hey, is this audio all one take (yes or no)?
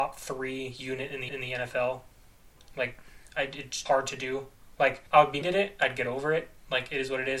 no